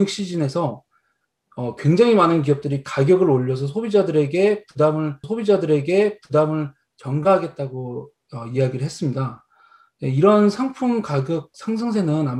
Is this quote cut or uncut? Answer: cut